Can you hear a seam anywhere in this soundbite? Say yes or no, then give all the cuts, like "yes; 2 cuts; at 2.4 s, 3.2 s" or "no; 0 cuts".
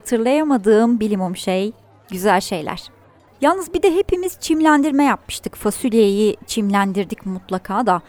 no; 0 cuts